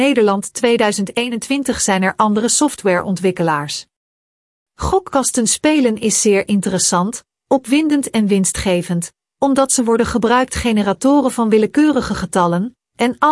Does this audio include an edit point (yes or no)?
no